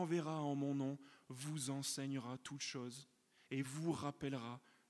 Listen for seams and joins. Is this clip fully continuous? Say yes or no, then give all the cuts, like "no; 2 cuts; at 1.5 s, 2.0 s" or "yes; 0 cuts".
yes; 0 cuts